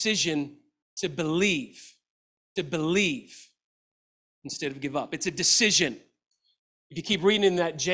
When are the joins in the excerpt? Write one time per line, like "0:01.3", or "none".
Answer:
0:02.6